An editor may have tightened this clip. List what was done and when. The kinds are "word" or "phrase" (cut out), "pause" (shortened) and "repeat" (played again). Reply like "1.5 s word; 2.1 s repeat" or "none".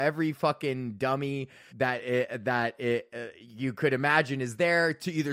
1.7 s word